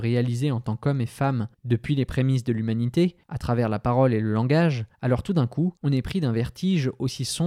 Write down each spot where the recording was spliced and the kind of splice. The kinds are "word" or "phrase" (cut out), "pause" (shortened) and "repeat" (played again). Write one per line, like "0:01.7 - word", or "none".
0:01.5 - pause
0:03.2 - pause
0:04.9 - pause
0:05.8 - pause